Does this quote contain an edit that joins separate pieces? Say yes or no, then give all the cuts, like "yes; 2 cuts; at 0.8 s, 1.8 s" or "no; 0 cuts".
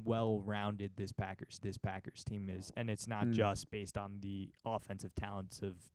yes; 1 cut; at 1.6 s